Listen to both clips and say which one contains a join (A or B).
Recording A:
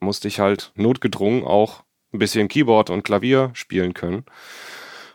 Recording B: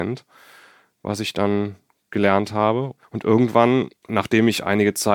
B